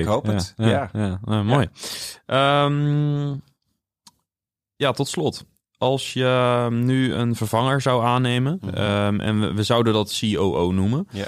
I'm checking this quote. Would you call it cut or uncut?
uncut